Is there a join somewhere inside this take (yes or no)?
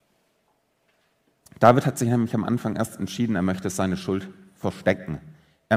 no